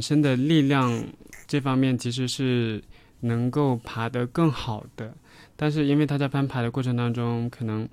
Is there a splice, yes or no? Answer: no